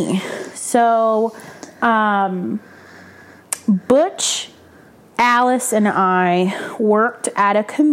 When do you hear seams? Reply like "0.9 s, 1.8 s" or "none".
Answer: none